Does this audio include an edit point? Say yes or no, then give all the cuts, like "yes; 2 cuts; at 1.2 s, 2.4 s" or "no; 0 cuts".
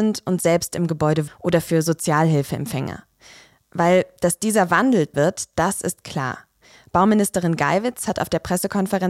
yes; 2 cuts; at 1.3 s, 5.1 s